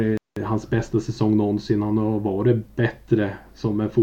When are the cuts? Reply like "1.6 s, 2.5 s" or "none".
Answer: none